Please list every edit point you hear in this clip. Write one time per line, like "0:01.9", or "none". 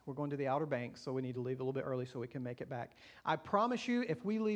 none

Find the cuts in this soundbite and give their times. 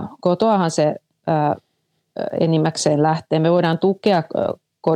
none

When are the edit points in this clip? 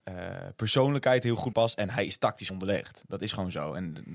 0:01.5
0:02.5

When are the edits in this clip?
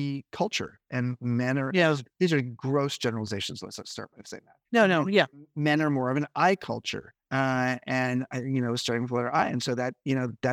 0:04.6
0:07.2

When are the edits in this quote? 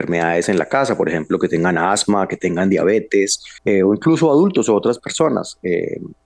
0:03.6

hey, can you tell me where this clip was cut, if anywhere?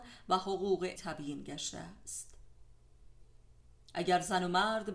0:01.0

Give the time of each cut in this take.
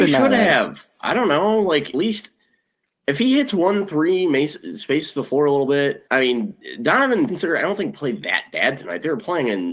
0:01.9
0:06.1
0:07.3

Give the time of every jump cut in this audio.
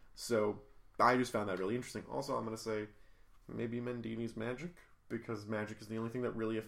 none

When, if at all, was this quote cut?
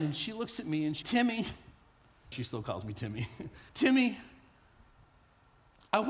0:01.0
0:02.3
0:03.7

